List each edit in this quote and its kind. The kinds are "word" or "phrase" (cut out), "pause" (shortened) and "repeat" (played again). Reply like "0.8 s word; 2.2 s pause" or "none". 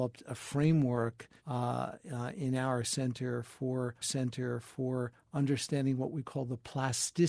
1.4 s pause; 4.0 s repeat